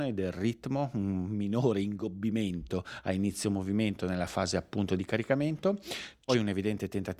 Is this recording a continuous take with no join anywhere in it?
yes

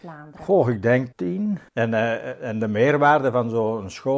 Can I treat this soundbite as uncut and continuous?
no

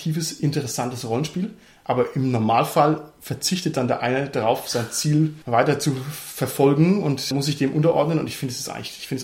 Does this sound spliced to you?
no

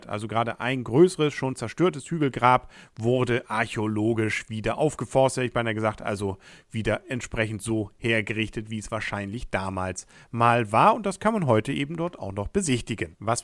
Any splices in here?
no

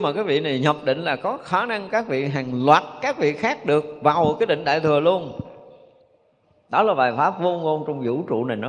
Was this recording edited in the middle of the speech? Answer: no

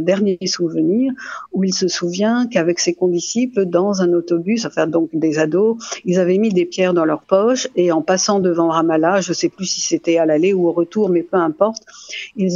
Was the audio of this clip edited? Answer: no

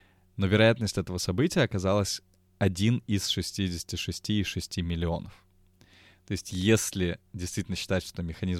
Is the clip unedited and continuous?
yes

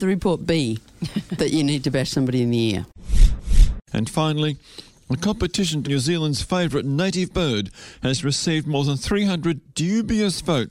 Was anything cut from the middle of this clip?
yes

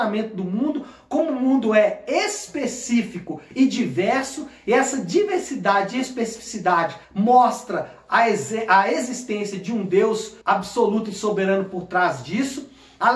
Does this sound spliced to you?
yes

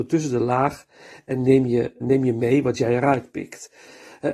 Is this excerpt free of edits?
no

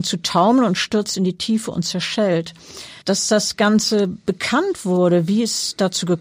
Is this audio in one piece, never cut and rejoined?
no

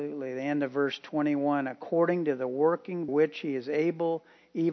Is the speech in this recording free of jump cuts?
no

